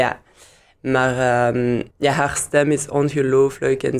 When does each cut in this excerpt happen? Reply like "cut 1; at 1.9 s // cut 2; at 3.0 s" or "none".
cut 1; at 1.9 s

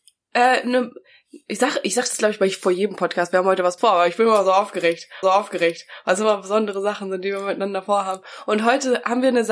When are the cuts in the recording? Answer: cut 1; at 3.8 s // cut 2; at 5.2 s

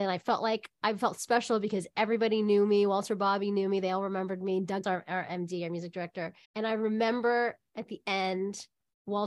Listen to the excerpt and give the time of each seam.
cut 1; at 4.8 s // cut 2; at 6.4 s

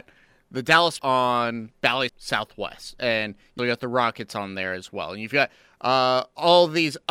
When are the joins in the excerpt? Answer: cut 1; at 1.0 s // cut 2; at 2.1 s // cut 3; at 3.6 s

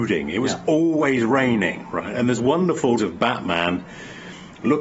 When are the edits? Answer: cut 1; at 2.4 s // cut 2; at 3.0 s

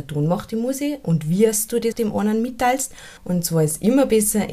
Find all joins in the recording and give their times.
cut 1; at 1.9 s // cut 2; at 3.2 s

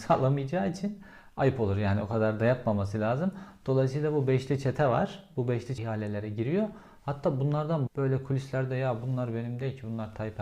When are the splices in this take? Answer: cut 1; at 5.8 s // cut 2; at 7.9 s

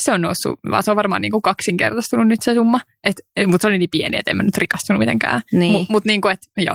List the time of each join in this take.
none

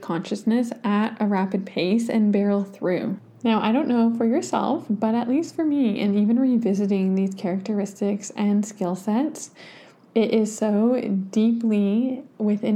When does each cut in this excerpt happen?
none

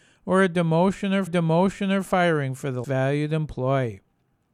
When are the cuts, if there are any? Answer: cut 1; at 1.3 s // cut 2; at 2.8 s

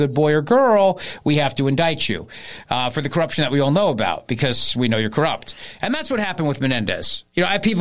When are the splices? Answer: none

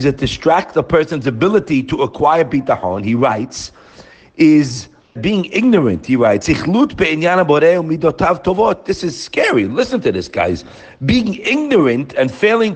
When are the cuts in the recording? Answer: cut 1; at 5.2 s // cut 2; at 6.4 s

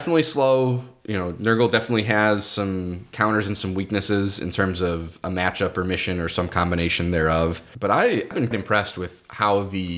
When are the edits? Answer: cut 1; at 8.5 s

